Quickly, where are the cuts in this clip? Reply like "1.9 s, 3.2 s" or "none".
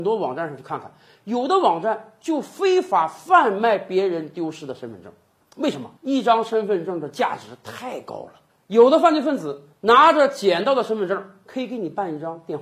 6.0 s